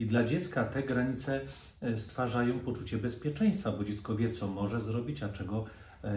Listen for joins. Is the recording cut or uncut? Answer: uncut